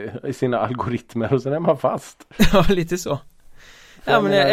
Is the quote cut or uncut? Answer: uncut